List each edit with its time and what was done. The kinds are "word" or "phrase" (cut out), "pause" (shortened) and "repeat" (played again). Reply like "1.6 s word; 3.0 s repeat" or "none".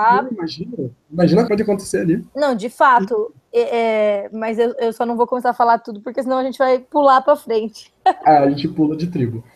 1.5 s phrase